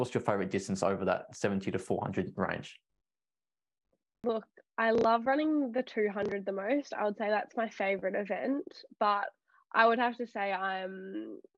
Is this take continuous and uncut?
yes; 0 cuts

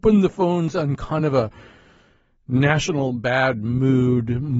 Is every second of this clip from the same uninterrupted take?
yes; 0 cuts

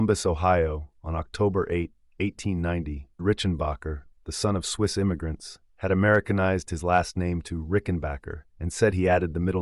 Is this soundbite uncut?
no; 2 cuts; at 3.2 s, 8.5 s

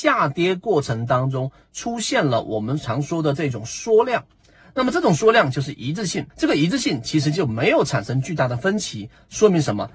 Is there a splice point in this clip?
yes; 1 cut; at 6.3 s

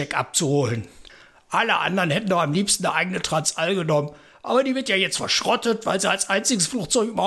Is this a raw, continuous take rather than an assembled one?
yes; 0 cuts

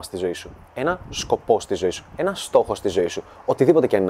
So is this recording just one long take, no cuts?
yes; 0 cuts

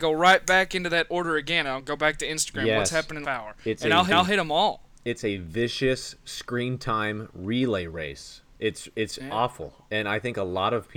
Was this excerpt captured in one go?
no; 2 cuts; at 3.2 s, 4.1 s

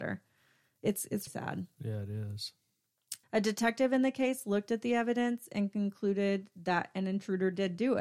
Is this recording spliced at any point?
yes; 2 cuts; at 1.3 s, 3.2 s

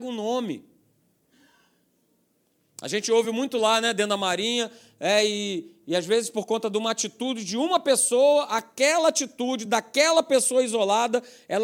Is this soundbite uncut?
yes; 0 cuts

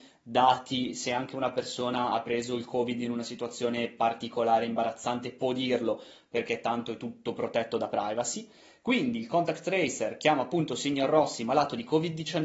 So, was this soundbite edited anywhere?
no; 0 cuts

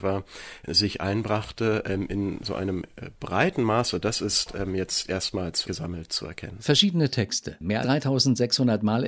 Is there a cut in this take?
yes; 2 cuts; at 5.6 s, 7.8 s

